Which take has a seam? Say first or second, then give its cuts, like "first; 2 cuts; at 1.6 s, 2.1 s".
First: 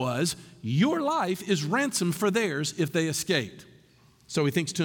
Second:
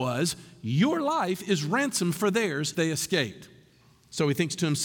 second; 1 cut; at 2.7 s